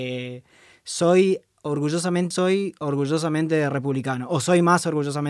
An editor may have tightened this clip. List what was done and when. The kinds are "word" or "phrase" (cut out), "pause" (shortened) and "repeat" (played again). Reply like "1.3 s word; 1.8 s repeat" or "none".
2.3 s phrase